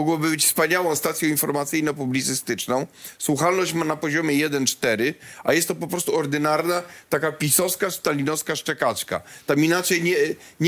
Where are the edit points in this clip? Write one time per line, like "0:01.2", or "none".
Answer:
none